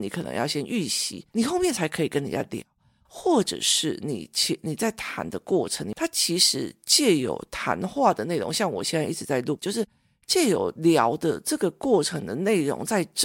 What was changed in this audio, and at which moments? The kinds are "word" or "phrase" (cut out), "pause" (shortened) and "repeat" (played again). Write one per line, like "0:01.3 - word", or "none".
0:01.3 - pause
0:09.6 - word

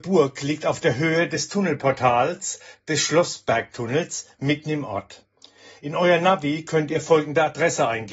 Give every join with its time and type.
none

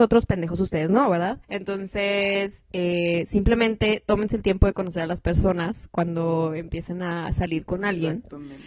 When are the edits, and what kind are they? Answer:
0:01.4 - pause

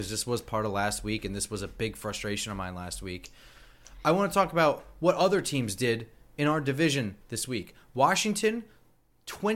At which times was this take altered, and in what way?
none

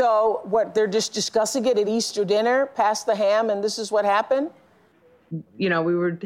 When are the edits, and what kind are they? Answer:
none

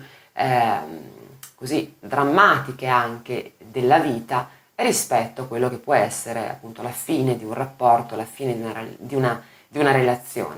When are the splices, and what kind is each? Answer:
none

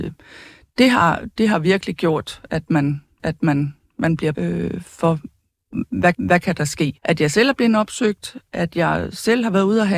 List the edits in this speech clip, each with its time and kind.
0:03.2 - repeat
0:04.3 - word
0:06.1 - repeat
0:07.0 - pause

